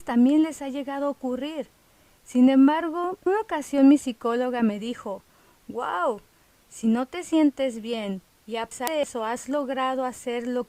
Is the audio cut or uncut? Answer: cut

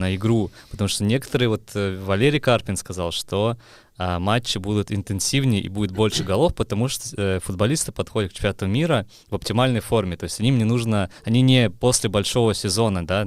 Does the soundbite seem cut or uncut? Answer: uncut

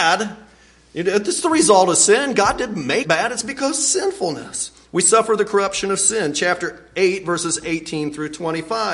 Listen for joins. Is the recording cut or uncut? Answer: cut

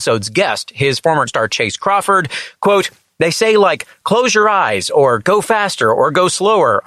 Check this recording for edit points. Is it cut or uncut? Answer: cut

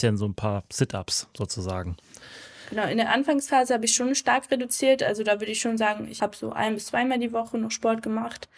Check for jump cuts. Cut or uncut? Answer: uncut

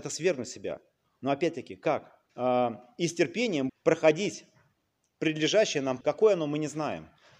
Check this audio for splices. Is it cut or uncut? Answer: cut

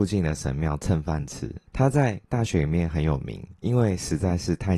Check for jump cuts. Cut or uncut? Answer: cut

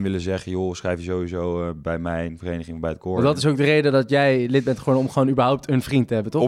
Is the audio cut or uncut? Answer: uncut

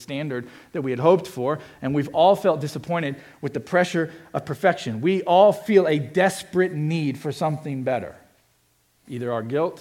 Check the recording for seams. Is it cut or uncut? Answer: uncut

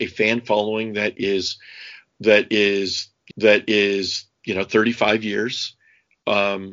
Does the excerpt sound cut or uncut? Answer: cut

